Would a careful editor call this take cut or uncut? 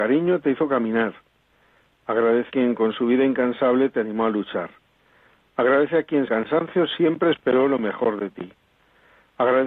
cut